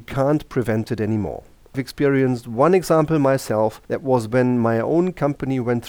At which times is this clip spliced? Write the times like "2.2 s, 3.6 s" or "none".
1.7 s, 3.8 s